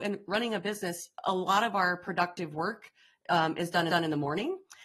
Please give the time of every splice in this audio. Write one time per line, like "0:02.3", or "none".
0:01.1
0:03.9